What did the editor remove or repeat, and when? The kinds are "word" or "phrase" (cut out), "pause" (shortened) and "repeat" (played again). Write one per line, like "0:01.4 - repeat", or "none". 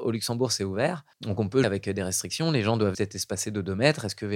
0:01.1 - pause
0:01.6 - word
0:02.9 - word